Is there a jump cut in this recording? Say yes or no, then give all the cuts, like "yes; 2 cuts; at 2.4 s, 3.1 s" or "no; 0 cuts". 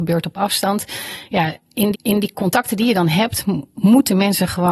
yes; 1 cut; at 1.9 s